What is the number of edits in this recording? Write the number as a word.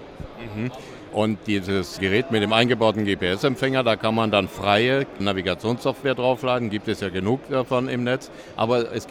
zero